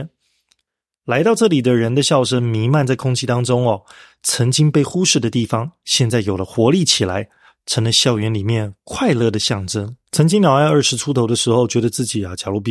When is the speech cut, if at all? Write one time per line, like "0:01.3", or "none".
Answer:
0:10.1